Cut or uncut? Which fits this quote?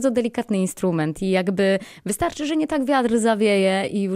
uncut